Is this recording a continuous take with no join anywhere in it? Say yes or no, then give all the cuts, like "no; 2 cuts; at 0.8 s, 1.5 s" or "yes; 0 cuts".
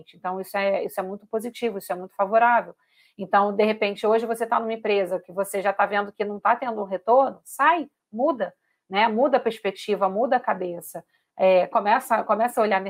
yes; 0 cuts